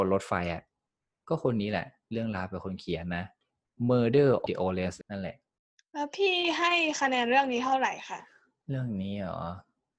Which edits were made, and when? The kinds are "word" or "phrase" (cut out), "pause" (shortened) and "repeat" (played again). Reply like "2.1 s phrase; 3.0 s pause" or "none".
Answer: 4.5 s word; 5.0 s word